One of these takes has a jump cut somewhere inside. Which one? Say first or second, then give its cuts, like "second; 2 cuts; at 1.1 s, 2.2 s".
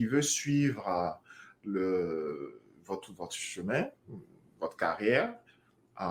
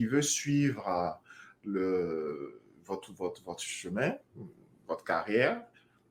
first; 1 cut; at 3.1 s